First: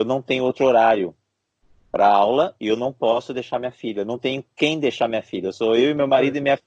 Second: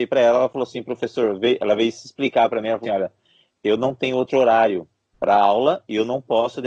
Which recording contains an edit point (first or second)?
second